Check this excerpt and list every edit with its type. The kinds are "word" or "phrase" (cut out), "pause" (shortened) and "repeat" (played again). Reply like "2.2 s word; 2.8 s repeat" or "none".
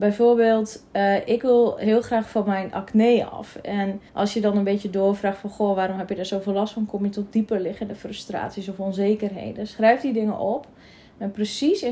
4.1 s pause